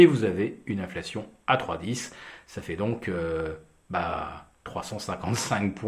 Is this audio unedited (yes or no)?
yes